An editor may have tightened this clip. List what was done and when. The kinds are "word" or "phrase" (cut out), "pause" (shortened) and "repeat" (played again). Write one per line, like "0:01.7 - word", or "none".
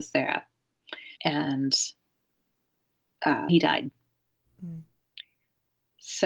0:01.2 - pause
0:03.5 - word